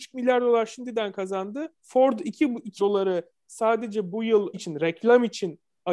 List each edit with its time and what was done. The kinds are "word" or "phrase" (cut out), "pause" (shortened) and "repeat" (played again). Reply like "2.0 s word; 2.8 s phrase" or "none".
1.8 s pause; 2.8 s word; 4.5 s phrase

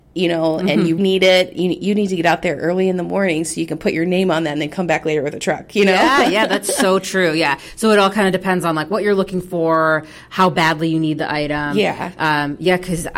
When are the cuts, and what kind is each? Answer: 1.0 s word

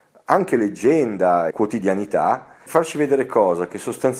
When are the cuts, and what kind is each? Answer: 1.5 s word; 2.7 s word

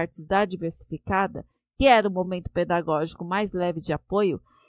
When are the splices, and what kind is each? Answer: none

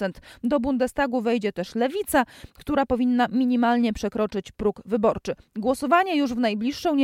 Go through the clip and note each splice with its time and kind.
none

